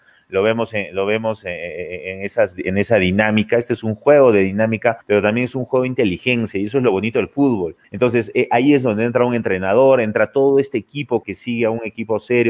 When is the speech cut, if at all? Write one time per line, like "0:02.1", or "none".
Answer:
0:05.0
0:07.8
0:11.2